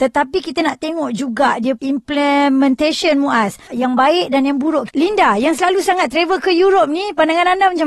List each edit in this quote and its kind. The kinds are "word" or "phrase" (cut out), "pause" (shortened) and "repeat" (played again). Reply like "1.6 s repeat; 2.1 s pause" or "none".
1.8 s word; 3.7 s word